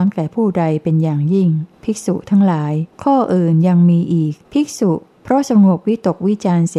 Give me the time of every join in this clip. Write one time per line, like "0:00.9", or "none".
0:01.7
0:02.9
0:04.4